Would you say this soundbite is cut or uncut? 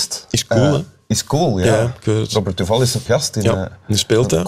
cut